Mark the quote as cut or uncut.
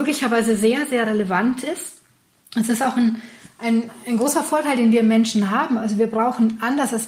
uncut